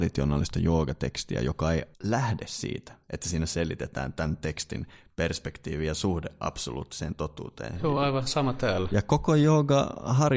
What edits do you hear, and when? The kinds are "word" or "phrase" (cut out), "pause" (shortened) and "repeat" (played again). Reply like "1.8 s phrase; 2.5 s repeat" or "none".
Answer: 1.9 s pause